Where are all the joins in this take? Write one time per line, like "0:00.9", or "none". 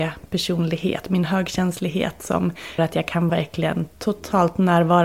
0:02.8
0:03.3